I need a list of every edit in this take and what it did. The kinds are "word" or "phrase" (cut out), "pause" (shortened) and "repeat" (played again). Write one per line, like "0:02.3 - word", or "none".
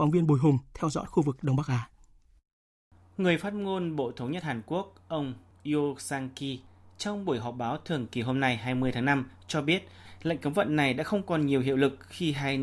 none